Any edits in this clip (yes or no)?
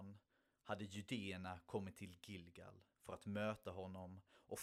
no